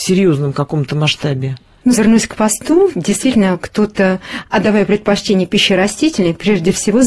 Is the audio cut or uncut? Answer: cut